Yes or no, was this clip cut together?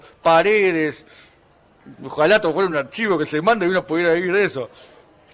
no